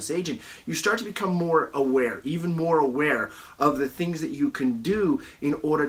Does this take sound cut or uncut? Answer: uncut